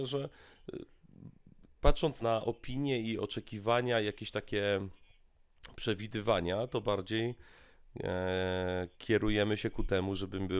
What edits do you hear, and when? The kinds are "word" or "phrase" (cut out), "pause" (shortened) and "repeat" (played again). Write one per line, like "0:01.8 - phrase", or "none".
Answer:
0:02.2 - word
0:08.9 - pause